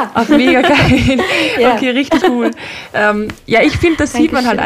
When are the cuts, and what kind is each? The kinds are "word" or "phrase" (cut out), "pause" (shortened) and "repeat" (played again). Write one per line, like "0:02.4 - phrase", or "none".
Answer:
0:02.2 - word